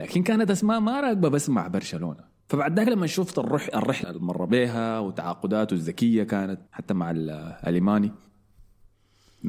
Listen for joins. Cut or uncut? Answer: cut